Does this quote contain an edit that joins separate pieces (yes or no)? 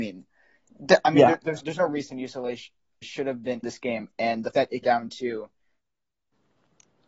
yes